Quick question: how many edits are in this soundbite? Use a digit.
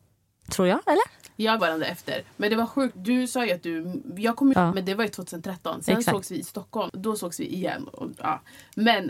3